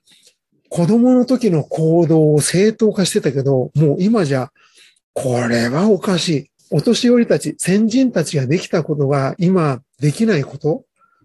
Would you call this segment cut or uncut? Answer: cut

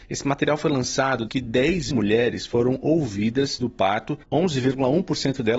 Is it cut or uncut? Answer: cut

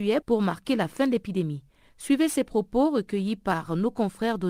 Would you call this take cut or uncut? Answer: uncut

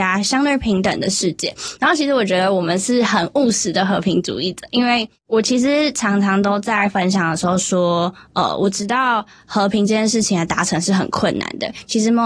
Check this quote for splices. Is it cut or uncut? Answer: uncut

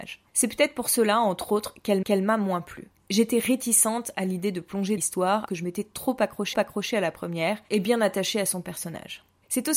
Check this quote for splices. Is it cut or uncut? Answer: cut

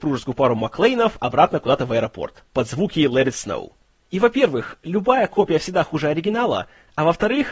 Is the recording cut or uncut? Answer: uncut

